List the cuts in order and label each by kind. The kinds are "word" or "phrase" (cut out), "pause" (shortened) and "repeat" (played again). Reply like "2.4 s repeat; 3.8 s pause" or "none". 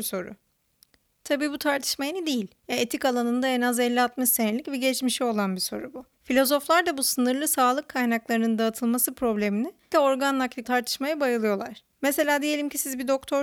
2.6 s pause; 6.1 s pause; 9.9 s word; 10.6 s word; 11.9 s pause